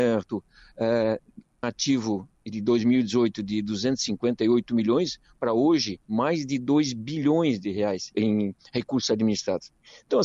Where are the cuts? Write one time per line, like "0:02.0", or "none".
0:01.6
0:06.0
0:08.1